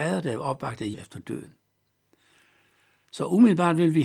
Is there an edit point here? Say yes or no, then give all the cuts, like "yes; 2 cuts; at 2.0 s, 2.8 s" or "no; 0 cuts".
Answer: yes; 1 cut; at 0.9 s